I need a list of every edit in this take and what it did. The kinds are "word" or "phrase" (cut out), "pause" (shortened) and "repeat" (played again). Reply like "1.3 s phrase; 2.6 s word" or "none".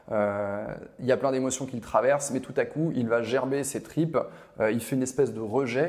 none